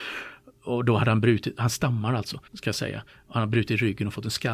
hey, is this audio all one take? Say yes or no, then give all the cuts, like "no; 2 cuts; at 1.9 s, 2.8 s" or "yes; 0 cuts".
no; 1 cut; at 2.5 s